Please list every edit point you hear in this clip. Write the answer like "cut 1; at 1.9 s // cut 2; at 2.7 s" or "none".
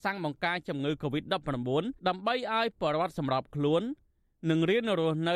cut 1; at 2.0 s